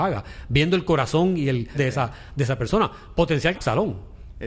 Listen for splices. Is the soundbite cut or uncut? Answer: cut